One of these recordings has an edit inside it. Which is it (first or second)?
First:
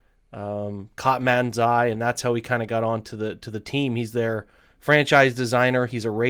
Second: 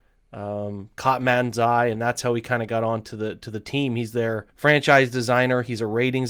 second